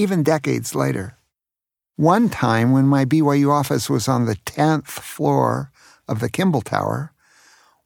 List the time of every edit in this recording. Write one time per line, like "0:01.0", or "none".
none